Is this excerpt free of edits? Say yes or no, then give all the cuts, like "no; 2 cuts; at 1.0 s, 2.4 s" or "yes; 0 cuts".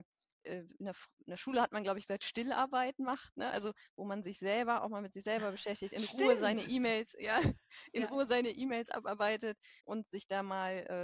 no; 1 cut; at 9.8 s